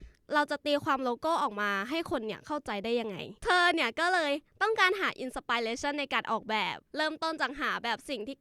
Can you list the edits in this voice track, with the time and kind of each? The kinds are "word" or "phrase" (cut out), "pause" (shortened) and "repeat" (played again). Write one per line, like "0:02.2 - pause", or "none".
0:03.4 - pause
0:06.8 - pause

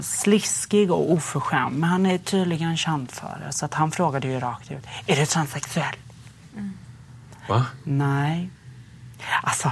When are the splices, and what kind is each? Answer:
none

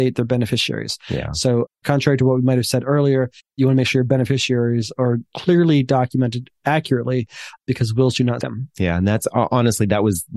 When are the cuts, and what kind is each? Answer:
0:01.8 - pause
0:03.4 - pause
0:07.6 - pause
0:08.4 - word

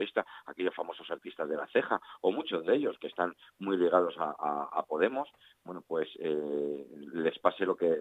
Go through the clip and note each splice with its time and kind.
none

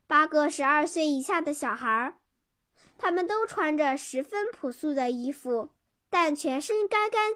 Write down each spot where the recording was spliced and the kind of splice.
0:05.9 - pause

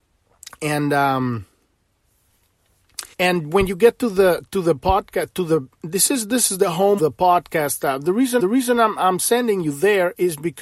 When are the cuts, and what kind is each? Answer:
0:03.1 - pause
0:07.0 - word
0:08.4 - repeat

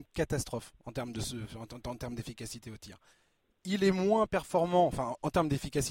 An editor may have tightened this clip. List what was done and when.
0:03.1 - pause

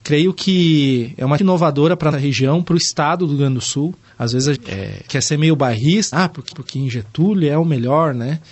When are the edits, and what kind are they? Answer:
0:01.4 - phrase
0:02.1 - word
0:04.1 - pause
0:04.5 - word
0:05.1 - pause
0:06.1 - word
0:06.5 - repeat

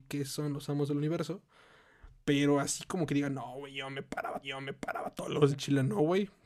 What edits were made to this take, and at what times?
0:04.4 - repeat
0:05.5 - phrase

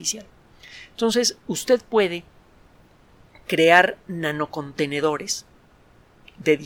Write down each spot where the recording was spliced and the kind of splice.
none

